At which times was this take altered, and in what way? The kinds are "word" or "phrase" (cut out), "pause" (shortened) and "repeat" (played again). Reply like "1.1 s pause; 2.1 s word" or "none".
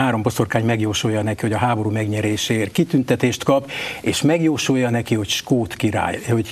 none

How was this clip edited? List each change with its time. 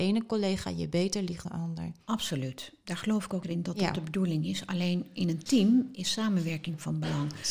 1.4 s word; 3.4 s word

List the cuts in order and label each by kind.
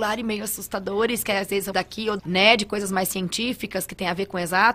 1.7 s word; 2.2 s word

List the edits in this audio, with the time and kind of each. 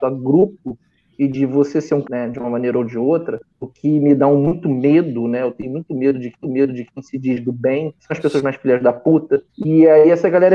2.0 s phrase; 3.5 s pause; 6.4 s repeat; 8.0 s pause; 9.5 s pause

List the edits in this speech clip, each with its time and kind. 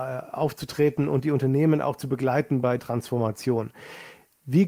2.8 s word

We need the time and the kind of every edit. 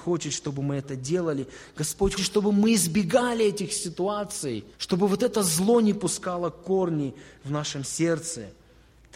2.2 s word; 4.7 s pause

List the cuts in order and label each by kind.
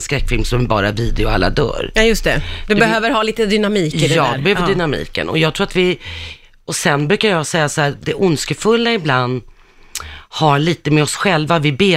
none

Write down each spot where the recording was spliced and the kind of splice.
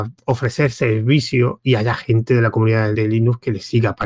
2.9 s word

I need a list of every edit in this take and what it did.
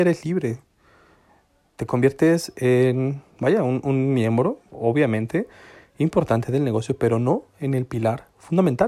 3.3 s pause; 4.7 s pause

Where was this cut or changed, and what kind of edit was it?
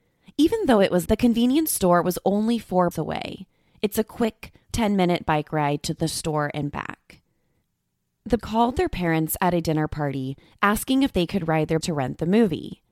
1.1 s word; 2.9 s word; 4.7 s word; 8.4 s word; 11.8 s word

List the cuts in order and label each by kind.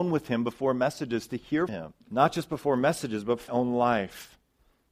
1.7 s word; 2.0 s pause; 3.5 s word

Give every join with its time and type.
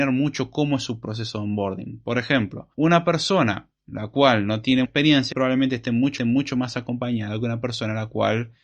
2.7 s pause; 3.8 s pause; 4.8 s word; 5.3 s word; 6.2 s repeat

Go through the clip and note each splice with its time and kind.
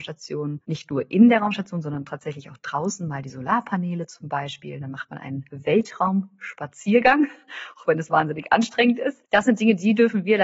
none

